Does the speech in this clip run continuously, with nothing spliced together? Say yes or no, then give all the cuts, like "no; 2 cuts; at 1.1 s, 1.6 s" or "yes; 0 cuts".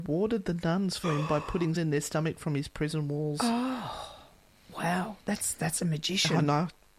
no; 3 cuts; at 1.0 s, 1.8 s, 4.5 s